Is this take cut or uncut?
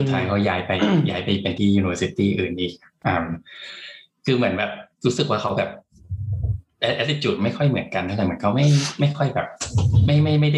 cut